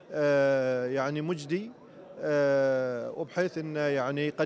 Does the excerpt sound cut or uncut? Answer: uncut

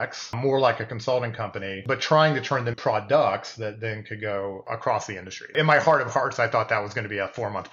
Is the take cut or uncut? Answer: cut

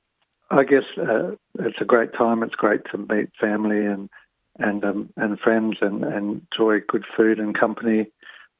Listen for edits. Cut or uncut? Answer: uncut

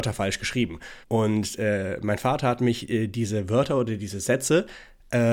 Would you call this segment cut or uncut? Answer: cut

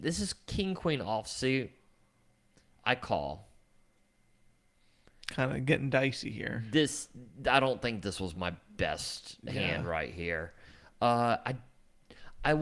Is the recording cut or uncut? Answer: uncut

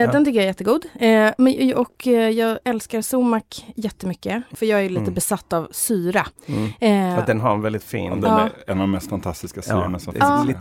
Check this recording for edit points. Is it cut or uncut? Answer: uncut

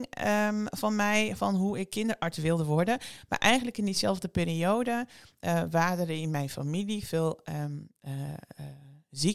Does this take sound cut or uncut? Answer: uncut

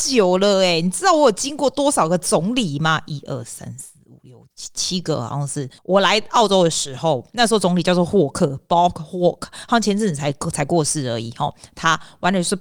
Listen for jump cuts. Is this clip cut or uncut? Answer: cut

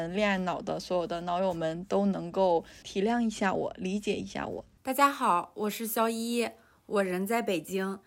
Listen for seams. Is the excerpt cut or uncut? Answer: uncut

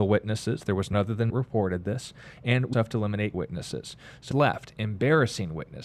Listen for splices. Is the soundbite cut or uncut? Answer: cut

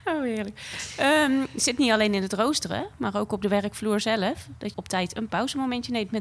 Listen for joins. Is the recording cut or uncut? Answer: cut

